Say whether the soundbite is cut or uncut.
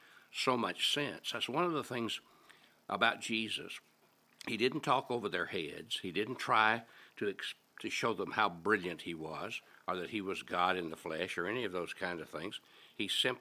uncut